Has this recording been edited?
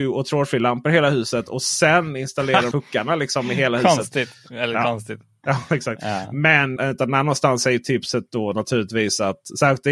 yes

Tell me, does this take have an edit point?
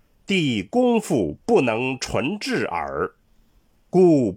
no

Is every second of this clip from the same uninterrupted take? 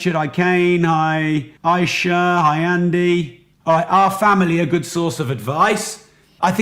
no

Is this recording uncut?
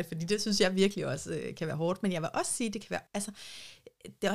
no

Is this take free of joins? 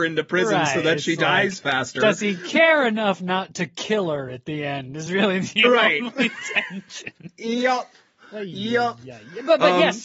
yes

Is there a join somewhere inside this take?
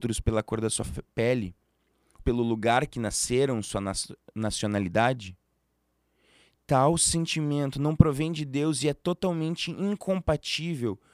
yes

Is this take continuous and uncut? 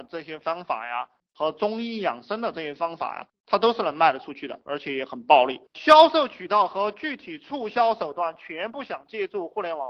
yes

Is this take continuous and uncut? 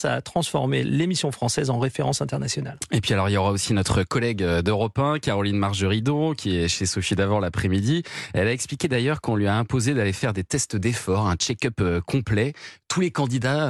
yes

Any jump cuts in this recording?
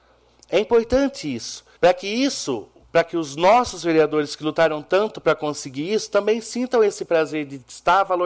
yes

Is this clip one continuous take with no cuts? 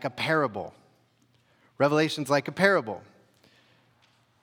yes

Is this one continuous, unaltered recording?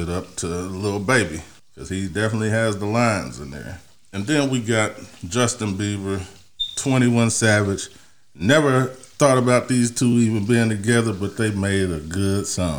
yes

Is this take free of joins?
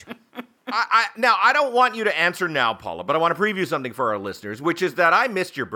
yes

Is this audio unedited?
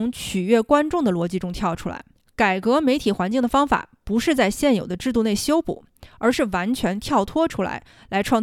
yes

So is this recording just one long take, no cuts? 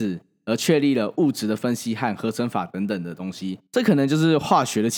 no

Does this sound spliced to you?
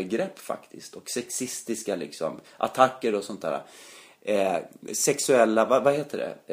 no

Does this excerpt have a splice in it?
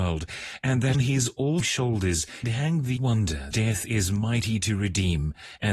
yes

